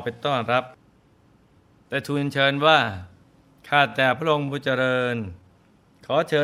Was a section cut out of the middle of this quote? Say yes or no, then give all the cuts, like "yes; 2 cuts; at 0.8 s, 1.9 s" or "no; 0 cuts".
no; 0 cuts